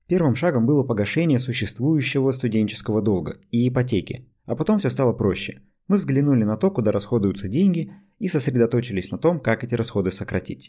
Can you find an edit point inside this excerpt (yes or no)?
no